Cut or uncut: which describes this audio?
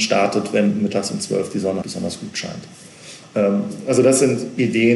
cut